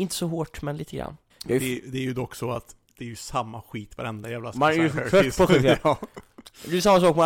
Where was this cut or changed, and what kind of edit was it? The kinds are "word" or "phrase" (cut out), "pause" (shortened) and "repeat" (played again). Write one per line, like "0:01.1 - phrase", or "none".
0:01.3 - pause
0:02.8 - pause
0:04.5 - word